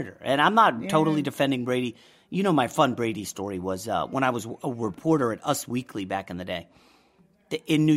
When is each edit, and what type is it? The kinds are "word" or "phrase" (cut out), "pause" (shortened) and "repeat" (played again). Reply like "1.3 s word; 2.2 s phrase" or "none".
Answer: none

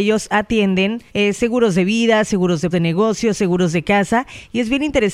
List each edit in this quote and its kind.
1.1 s pause; 2.7 s phrase

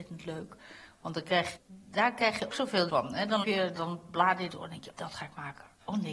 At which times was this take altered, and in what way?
1.6 s word; 2.5 s word; 2.9 s word; 3.4 s word; 3.7 s word; 4.5 s word; 4.9 s word

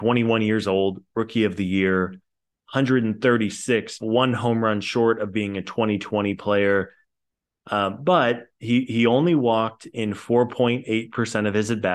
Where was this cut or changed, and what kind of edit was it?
4.0 s phrase

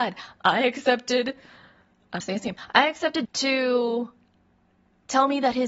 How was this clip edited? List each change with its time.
2.2 s word; 3.2 s word

